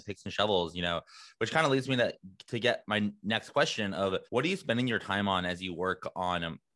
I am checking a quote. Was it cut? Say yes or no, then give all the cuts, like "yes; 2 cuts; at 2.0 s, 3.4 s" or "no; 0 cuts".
yes; 1 cut; at 4.3 s